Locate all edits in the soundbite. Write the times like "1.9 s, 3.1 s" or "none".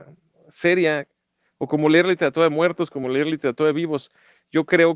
none